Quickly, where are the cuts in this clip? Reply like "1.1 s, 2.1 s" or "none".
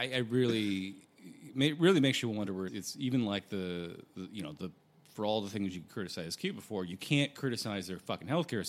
2.7 s